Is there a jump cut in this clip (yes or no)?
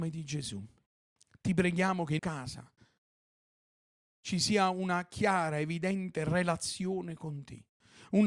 yes